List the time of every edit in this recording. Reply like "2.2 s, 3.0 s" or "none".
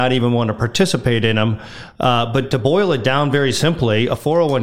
none